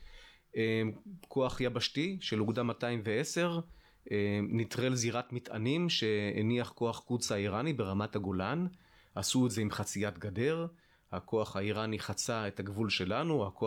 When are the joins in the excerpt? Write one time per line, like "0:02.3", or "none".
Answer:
none